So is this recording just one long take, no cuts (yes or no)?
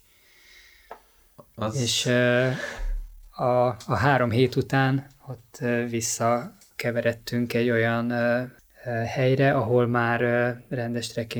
yes